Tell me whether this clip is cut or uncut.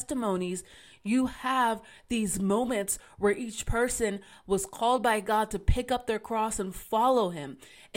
uncut